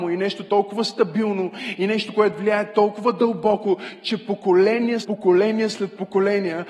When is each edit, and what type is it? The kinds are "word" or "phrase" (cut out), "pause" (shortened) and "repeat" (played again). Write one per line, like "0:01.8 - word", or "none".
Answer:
0:05.0 - word